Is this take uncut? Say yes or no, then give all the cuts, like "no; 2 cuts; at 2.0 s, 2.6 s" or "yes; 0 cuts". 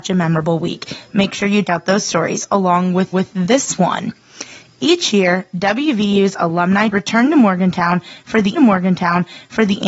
no; 4 cuts; at 1.6 s, 3.1 s, 6.9 s, 8.6 s